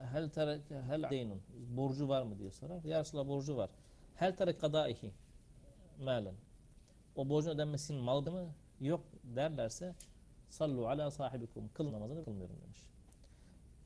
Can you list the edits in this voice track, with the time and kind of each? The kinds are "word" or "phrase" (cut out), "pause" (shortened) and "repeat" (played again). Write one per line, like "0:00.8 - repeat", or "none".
0:01.1 - word
0:04.6 - word
0:07.9 - word
0:08.2 - word
0:11.9 - word
0:12.2 - word

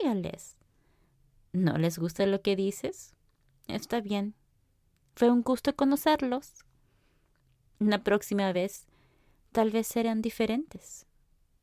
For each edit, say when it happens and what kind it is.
none

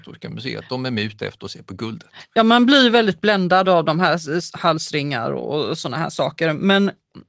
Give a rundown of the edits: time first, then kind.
none

